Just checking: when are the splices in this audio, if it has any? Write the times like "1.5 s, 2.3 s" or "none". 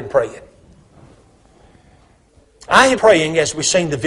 3.0 s